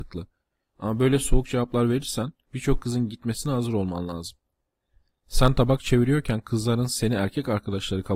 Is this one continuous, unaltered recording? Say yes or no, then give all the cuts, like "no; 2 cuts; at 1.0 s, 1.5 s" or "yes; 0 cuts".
yes; 0 cuts